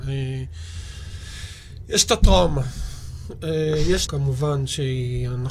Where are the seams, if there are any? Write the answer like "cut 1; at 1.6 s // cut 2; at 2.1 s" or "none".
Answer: cut 1; at 4.1 s